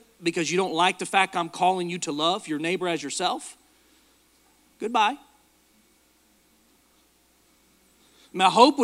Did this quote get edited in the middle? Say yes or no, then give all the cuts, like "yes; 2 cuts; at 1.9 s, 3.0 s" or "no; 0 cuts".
no; 0 cuts